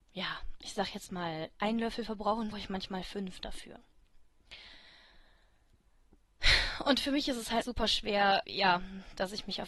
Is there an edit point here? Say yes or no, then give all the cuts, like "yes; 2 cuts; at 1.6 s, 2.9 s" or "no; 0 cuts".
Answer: yes; 3 cuts; at 2.5 s, 7.6 s, 8.4 s